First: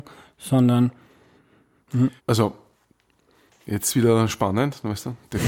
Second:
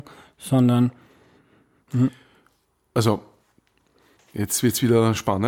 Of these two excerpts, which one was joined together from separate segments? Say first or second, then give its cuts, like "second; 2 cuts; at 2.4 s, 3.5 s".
first; 2 cuts; at 2.2 s, 3.9 s